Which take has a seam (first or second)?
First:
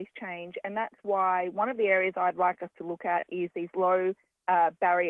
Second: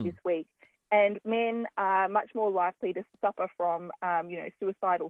second